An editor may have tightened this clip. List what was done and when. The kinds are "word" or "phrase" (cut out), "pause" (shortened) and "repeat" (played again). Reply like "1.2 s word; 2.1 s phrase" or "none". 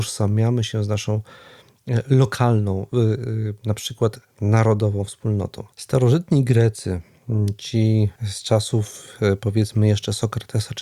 5.7 s pause; 8.2 s pause